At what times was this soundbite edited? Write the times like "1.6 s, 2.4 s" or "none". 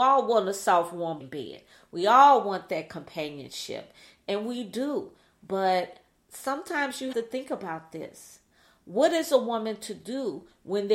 1.2 s, 7.1 s